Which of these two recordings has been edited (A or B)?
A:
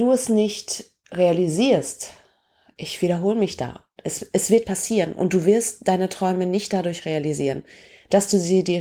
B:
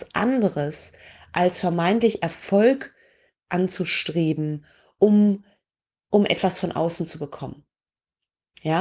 A